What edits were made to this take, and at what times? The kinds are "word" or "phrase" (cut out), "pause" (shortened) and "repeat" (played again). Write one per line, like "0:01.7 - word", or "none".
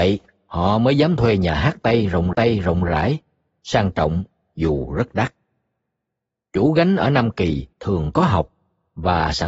0:02.3 - repeat
0:07.7 - pause